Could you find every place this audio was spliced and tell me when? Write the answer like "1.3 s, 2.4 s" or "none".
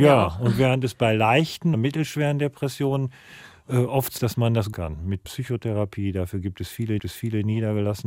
1.7 s, 4.2 s, 4.7 s, 5.2 s, 7.0 s